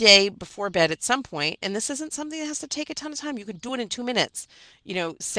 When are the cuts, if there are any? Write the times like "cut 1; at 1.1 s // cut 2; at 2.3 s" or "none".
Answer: none